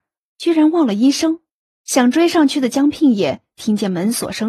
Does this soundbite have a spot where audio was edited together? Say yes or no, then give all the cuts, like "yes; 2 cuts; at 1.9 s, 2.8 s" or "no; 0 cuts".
yes; 1 cut; at 1.6 s